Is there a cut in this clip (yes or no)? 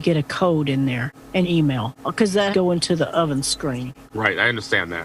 yes